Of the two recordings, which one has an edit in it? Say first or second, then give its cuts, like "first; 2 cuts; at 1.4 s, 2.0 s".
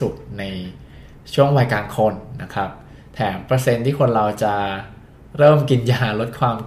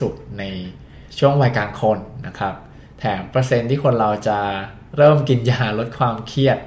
second; 2 cuts; at 1.1 s, 4.9 s